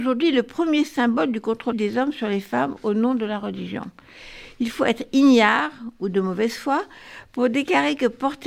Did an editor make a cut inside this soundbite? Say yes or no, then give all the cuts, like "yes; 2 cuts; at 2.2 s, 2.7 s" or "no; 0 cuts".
yes; 1 cut; at 1.7 s